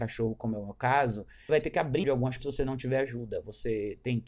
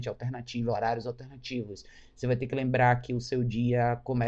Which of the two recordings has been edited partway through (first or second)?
first